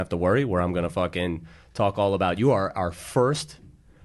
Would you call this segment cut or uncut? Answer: uncut